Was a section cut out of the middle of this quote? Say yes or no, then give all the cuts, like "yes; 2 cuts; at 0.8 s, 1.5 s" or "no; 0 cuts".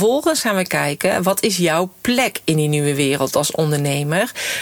no; 0 cuts